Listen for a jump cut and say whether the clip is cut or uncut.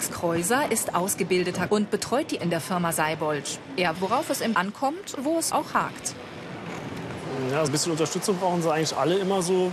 cut